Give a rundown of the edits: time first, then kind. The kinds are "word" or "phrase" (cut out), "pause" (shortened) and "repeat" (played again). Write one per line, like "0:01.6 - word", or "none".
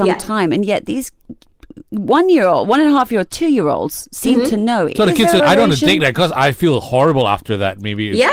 0:05.4 - word